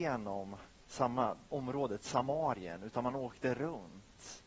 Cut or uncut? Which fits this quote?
cut